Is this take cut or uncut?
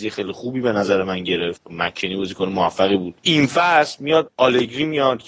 uncut